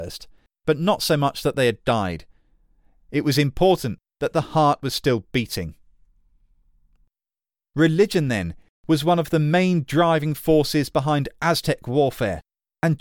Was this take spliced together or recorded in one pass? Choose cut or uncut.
uncut